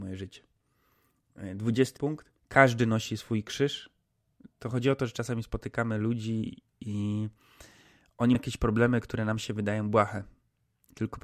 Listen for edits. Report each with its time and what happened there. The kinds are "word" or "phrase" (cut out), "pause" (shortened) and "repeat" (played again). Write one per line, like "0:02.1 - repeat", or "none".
0:02.0 - word
0:02.4 - pause
0:08.3 - word